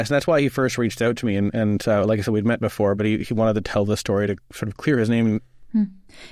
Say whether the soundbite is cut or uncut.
uncut